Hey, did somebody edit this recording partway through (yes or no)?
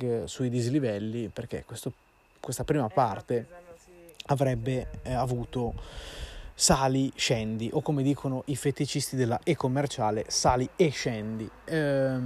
no